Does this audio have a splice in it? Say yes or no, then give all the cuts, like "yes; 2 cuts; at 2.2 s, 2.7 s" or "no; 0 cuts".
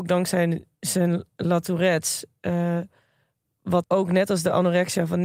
yes; 1 cut; at 3.8 s